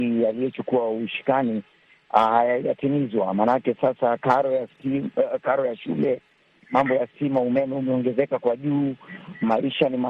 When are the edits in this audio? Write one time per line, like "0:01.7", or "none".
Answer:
none